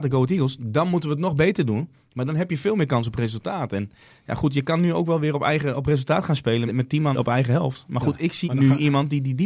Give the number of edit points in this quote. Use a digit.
3